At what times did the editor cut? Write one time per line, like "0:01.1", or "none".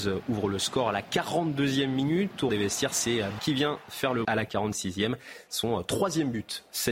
0:02.5
0:03.4
0:04.2